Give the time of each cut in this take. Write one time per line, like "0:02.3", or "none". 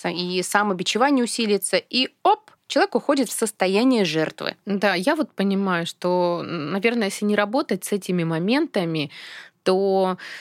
0:02.6